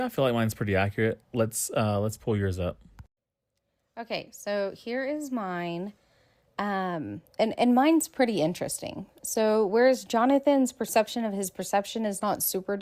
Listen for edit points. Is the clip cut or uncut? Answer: uncut